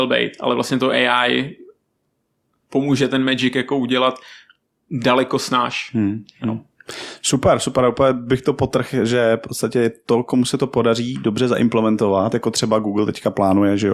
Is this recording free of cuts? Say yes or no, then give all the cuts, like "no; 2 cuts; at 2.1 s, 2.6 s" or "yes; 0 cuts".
yes; 0 cuts